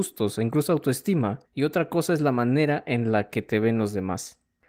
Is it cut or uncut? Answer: cut